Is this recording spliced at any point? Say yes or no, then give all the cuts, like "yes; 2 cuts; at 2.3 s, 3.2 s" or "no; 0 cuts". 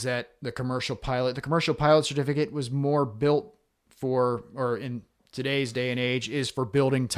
no; 0 cuts